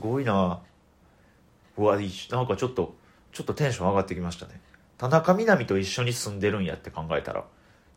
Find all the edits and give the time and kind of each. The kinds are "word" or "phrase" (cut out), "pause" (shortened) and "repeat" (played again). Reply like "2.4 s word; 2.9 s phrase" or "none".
none